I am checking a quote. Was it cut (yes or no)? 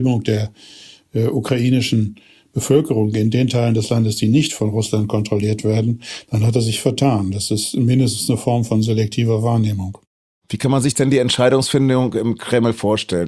no